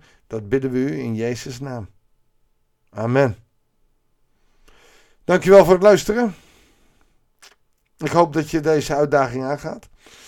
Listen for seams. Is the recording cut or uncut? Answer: uncut